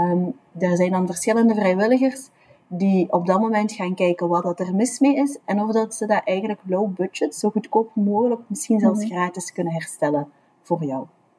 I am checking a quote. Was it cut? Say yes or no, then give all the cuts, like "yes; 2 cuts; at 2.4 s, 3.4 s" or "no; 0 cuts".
no; 0 cuts